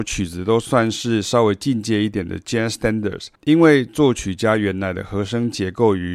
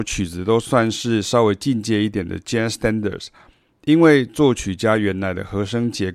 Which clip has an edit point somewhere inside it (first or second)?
first